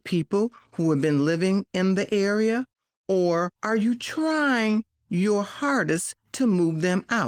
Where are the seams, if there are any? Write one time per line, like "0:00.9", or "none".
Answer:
0:03.5